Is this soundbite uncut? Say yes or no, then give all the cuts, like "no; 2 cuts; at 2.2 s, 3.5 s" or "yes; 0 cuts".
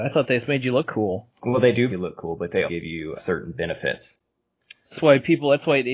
no; 5 cuts; at 1.3 s, 1.9 s, 2.6 s, 3.2 s, 4.9 s